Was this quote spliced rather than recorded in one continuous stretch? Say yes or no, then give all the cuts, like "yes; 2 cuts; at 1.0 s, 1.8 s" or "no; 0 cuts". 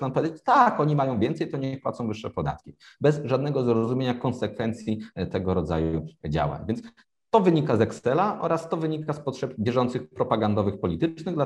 no; 0 cuts